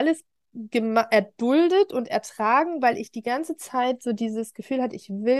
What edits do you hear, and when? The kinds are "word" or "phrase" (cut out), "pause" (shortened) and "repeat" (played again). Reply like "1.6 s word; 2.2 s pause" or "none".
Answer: none